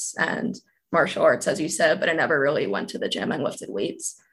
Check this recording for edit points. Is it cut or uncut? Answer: uncut